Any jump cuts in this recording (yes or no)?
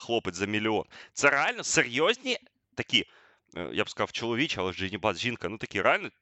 no